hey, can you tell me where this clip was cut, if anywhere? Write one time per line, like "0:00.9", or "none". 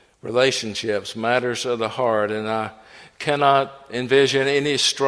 none